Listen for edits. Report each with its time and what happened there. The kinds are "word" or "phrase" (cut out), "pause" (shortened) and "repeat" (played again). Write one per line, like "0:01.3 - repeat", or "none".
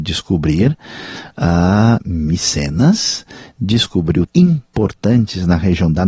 0:04.3 - phrase